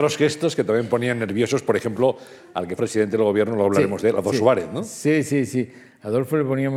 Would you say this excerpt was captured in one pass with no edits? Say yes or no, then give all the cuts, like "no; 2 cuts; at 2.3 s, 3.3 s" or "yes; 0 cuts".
no; 1 cut; at 2.8 s